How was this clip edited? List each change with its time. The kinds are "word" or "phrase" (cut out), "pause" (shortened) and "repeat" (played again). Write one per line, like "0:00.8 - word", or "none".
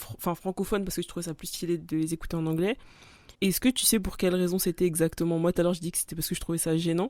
0:03.3 - pause